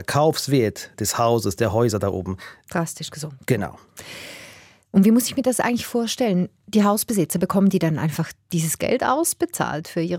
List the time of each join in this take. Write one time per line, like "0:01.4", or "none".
0:00.9

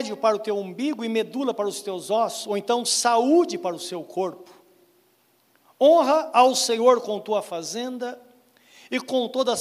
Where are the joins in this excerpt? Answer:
none

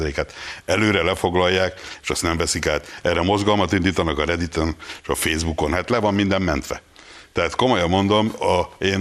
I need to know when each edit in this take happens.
none

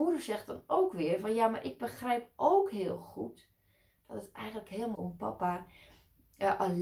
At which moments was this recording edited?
0:04.9

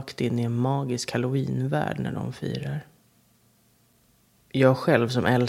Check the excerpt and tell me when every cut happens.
none

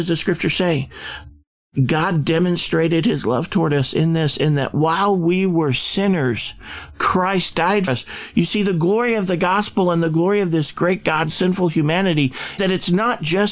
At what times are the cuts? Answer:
0:07.9
0:11.3
0:12.6

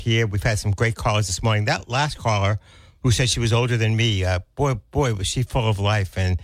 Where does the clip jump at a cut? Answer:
none

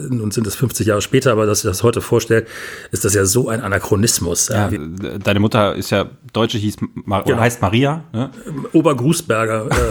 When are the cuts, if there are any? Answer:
0:04.7

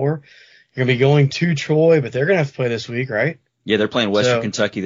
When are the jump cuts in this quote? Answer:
none

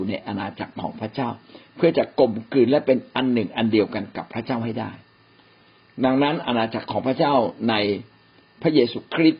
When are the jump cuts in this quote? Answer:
none

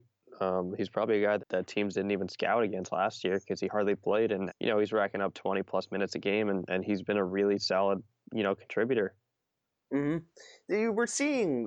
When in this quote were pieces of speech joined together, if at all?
0:01.4
0:04.5

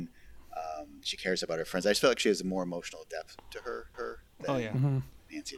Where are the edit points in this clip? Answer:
0:03.9

